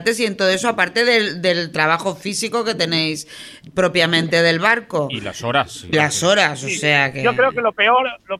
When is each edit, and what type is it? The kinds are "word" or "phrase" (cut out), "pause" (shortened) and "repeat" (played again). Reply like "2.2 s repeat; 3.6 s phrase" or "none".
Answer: 5.9 s phrase

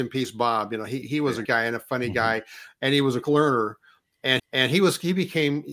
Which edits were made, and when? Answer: 1.0 s word; 1.4 s word; 3.2 s word; 4.4 s repeat

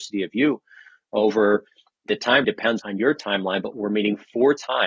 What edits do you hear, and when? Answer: 2.1 s word; 2.4 s word; 2.8 s word; 3.7 s word

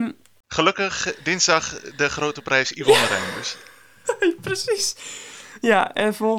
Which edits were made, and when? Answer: none

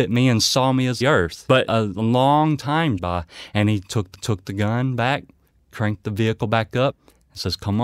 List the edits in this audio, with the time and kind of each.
1.0 s phrase; 3.0 s word; 4.1 s repeat

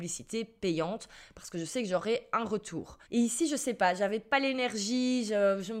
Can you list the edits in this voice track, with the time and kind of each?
3.0 s pause

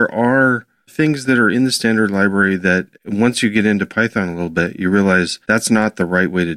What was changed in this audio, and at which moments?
5.4 s pause

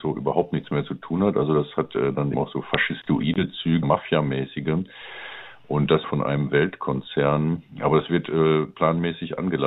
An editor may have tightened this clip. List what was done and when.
2.3 s word; 3.8 s word; 6.0 s word

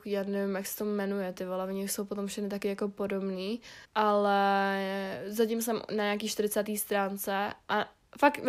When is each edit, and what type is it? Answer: 3.8 s pause

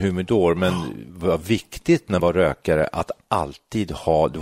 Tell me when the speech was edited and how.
2.2 s word

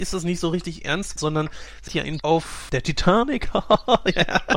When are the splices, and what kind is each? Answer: 1.2 s word; 1.9 s word; 2.2 s word; 2.7 s word

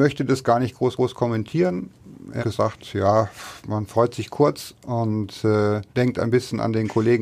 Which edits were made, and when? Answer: 1.0 s repeat; 2.4 s word; 5.9 s pause

